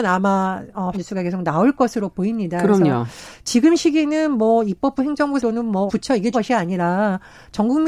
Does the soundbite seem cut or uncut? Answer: cut